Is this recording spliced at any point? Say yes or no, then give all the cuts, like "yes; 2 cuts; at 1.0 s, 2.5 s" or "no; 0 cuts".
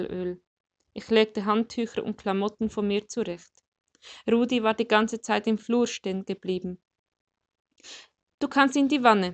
no; 0 cuts